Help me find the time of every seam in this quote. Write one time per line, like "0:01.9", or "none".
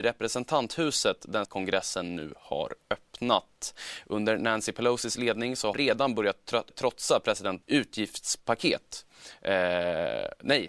0:01.4
0:05.7
0:06.7
0:07.6